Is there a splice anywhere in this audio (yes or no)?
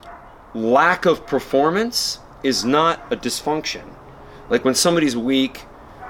no